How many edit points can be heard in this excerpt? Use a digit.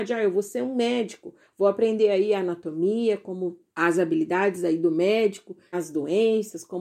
2